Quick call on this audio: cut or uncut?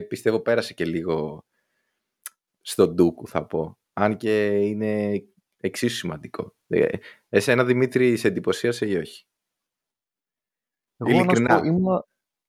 uncut